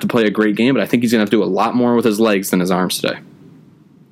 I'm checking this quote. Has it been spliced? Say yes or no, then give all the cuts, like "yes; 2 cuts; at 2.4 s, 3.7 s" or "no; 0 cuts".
no; 0 cuts